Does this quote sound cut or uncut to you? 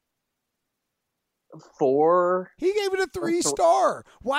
uncut